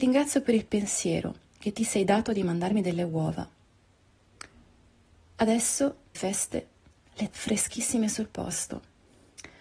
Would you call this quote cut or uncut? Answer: cut